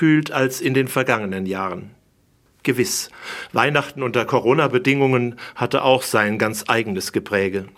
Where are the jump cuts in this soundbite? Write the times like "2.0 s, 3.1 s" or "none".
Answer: none

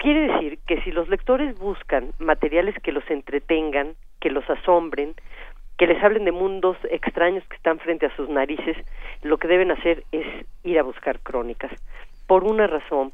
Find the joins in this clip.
none

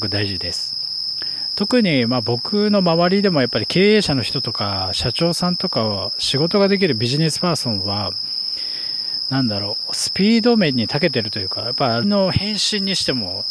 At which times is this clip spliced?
12.0 s

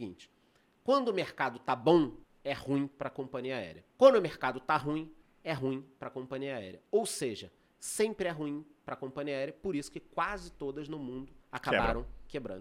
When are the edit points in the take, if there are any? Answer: 2.2 s, 3.9 s, 5.2 s, 11.4 s

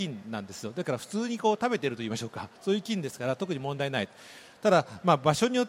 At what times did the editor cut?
2.6 s

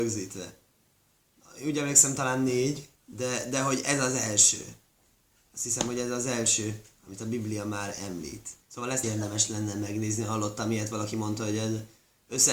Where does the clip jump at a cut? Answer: 3.0 s, 8.6 s, 9.0 s

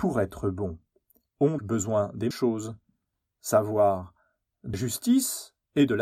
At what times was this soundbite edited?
1.6 s, 2.3 s, 4.7 s

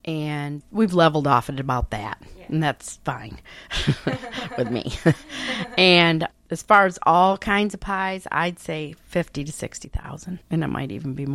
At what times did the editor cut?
none

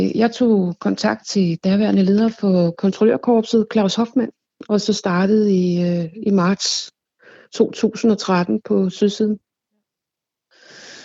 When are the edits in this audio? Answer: none

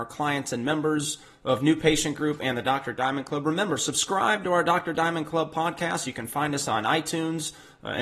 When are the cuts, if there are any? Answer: none

